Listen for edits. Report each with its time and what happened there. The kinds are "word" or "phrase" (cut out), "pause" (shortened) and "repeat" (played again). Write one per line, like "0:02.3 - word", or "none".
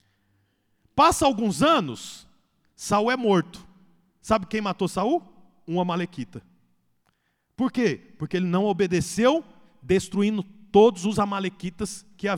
none